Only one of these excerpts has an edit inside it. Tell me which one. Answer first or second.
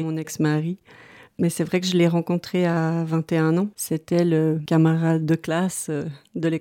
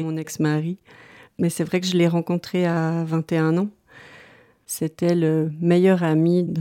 first